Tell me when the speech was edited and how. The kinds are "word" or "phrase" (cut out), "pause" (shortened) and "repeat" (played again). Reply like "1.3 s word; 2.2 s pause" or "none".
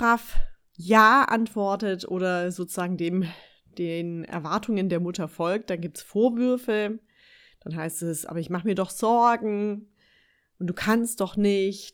none